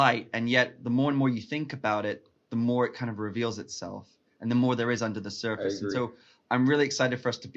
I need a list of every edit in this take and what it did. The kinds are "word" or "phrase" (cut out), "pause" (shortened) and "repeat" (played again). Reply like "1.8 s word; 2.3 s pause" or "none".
none